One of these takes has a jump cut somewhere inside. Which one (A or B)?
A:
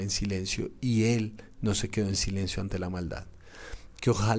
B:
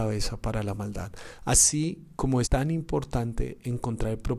B